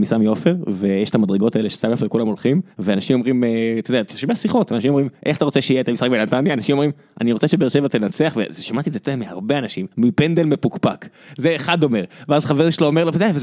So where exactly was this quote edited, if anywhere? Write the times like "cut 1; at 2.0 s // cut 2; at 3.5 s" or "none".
cut 1; at 2.7 s // cut 2; at 5.1 s // cut 3; at 9.9 s